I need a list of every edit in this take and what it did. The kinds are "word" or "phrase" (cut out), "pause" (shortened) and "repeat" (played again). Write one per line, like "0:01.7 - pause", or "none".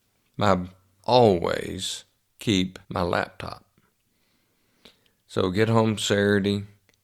0:01.0 - phrase
0:02.8 - pause